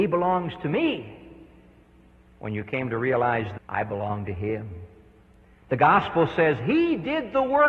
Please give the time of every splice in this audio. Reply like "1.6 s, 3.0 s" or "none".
3.6 s